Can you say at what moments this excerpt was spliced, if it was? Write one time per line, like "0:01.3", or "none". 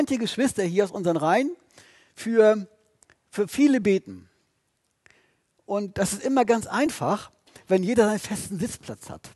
none